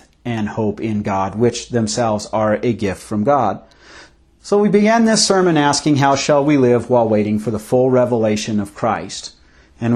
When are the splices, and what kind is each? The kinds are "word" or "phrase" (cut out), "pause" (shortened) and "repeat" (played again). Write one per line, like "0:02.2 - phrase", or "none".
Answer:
none

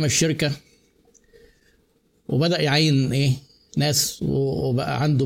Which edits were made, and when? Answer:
none

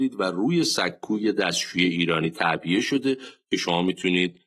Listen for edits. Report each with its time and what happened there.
none

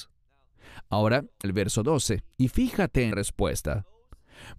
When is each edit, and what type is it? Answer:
0:01.4 - word
0:02.3 - pause
0:03.1 - word

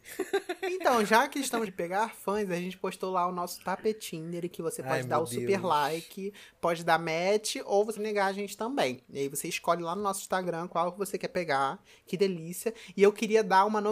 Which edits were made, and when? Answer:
0:01.7 - word
0:08.0 - word

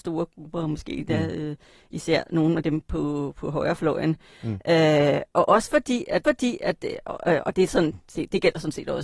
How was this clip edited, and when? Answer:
0:06.2 - repeat

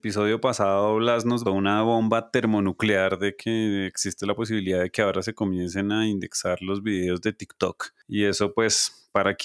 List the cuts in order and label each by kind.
0:01.5 - word

